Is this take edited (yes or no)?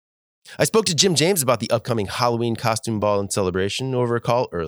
no